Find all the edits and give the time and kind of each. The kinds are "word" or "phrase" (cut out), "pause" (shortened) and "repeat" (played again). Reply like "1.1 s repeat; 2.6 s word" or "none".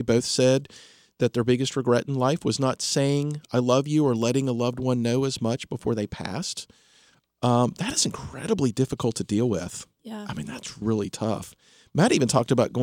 10.8 s word